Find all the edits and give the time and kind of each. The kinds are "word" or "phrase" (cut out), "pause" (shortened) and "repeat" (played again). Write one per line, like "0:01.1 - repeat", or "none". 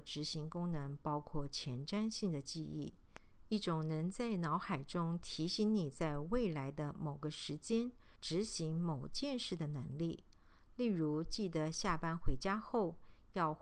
0:08.1 - pause